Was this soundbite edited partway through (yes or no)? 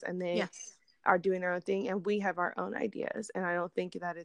no